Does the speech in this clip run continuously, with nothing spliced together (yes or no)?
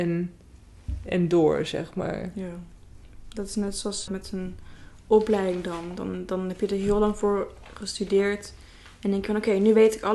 no